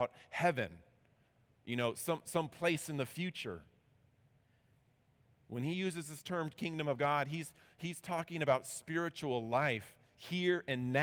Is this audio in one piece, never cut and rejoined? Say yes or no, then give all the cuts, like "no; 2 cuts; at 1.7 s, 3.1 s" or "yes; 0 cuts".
yes; 0 cuts